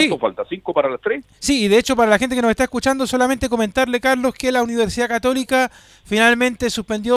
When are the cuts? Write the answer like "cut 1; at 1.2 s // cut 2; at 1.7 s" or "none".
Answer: none